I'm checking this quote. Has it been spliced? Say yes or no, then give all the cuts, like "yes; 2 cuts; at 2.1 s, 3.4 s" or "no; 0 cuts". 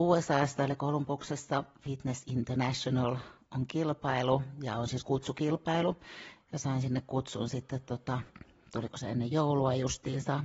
no; 0 cuts